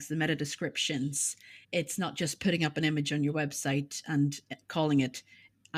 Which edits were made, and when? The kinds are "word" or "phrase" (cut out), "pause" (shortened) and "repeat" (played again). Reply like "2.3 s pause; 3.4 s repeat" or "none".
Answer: 1.6 s pause

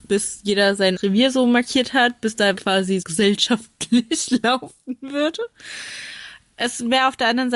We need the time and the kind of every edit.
1.0 s word; 2.6 s word; 3.0 s word

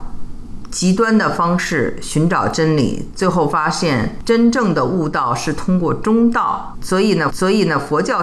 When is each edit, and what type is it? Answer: 7.3 s repeat

